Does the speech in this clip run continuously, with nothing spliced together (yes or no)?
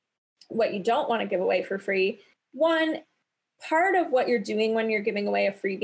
yes